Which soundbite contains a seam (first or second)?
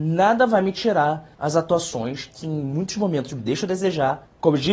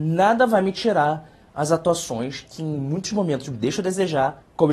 first